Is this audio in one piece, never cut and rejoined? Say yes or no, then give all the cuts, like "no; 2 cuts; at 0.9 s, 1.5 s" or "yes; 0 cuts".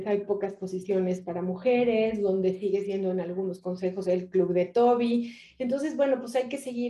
yes; 0 cuts